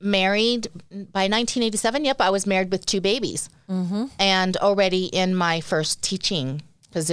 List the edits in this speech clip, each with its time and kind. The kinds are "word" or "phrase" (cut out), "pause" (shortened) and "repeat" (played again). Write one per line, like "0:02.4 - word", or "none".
none